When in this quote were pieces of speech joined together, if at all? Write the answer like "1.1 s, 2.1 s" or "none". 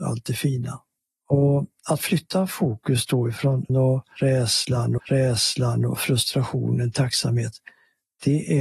3.7 s, 5.0 s, 6.9 s